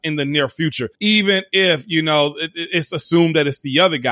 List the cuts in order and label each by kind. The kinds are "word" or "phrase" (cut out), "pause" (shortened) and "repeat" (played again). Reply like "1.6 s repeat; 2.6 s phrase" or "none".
0.9 s pause